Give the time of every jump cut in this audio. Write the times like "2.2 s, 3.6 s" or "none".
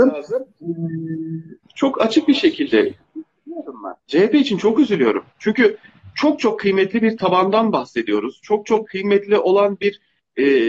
1.6 s, 4.0 s